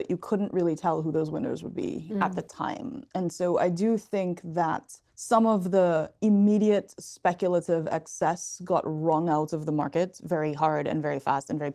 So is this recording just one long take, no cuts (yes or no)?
no